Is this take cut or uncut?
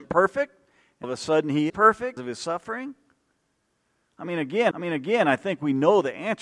cut